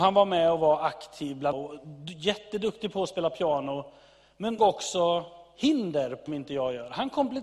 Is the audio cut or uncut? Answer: cut